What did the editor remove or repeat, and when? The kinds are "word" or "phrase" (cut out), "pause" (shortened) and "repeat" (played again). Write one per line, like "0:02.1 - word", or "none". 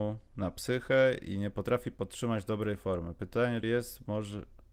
0:03.6 - word